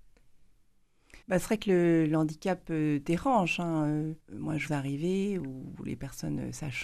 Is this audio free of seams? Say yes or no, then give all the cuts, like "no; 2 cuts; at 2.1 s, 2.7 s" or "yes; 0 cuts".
no; 3 cuts; at 1.2 s, 4.2 s, 4.7 s